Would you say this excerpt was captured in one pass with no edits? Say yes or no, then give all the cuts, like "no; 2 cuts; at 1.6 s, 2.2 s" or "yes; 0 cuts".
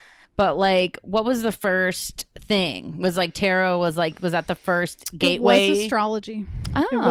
yes; 0 cuts